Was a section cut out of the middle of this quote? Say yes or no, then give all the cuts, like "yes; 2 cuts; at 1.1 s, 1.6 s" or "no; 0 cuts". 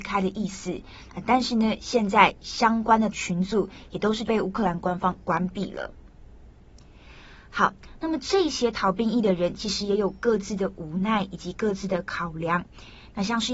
yes; 1 cut; at 3.1 s